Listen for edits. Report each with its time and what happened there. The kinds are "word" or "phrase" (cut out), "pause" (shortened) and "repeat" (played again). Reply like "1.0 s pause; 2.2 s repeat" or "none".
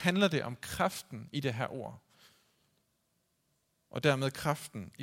none